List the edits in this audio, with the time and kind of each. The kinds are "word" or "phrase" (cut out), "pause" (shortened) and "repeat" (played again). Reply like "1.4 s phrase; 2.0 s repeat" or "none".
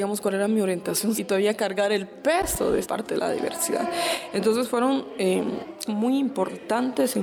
1.2 s word; 2.8 s word; 5.9 s word